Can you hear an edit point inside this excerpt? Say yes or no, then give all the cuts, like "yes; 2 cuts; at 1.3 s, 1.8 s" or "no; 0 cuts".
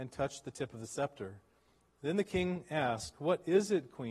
no; 0 cuts